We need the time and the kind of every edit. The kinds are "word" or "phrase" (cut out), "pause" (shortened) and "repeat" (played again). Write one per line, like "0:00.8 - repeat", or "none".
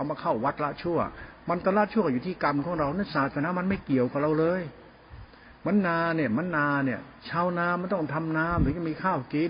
0:07.2 - pause